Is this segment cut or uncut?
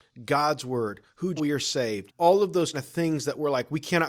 cut